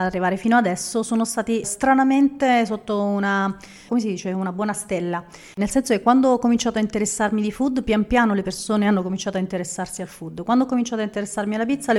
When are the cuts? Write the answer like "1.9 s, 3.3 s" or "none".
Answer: none